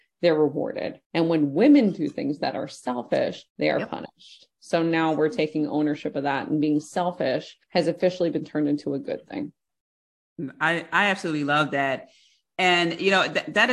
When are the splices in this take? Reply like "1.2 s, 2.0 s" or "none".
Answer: 1.0 s, 3.5 s, 7.6 s